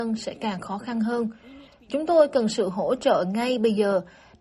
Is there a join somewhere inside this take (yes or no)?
no